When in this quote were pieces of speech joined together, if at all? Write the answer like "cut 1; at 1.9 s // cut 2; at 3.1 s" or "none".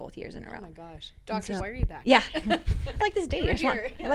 cut 1; at 1.6 s // cut 2; at 3.0 s